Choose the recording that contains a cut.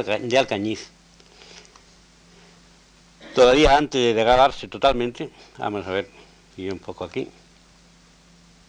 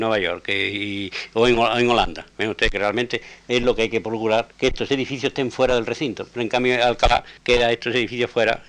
second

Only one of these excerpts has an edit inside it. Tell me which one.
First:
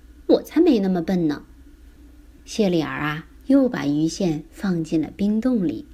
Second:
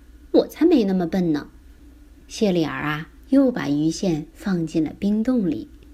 second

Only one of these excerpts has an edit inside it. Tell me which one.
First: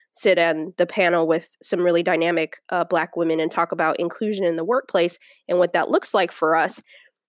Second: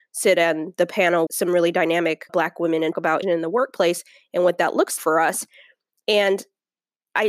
second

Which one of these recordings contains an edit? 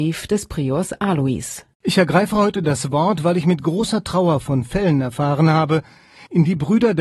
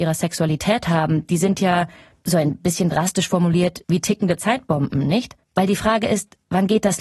second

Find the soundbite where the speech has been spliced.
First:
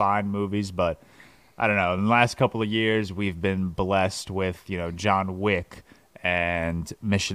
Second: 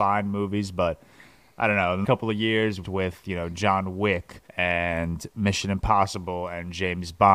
second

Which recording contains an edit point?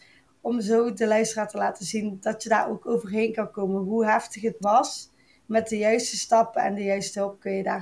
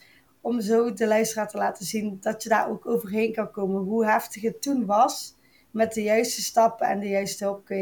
first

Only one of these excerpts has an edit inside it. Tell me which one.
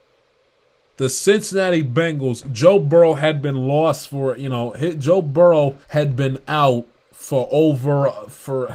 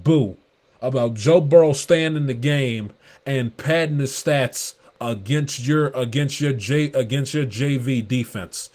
first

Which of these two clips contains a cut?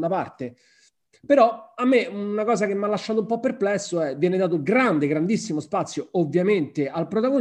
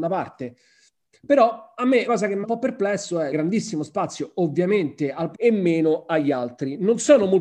second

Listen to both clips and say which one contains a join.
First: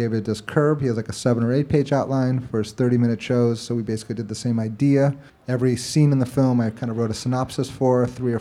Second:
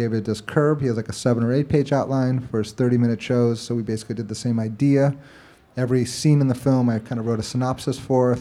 first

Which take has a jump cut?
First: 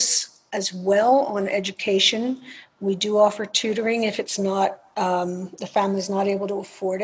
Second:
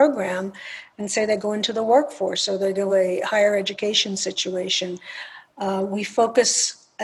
second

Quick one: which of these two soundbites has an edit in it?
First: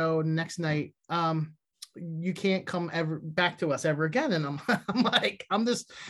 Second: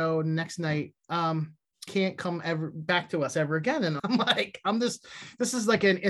second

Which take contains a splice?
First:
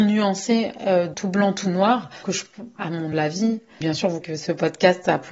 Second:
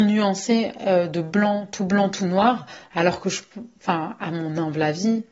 first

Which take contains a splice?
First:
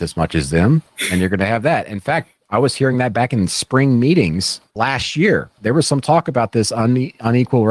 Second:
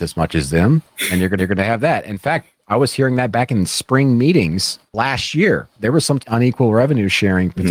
second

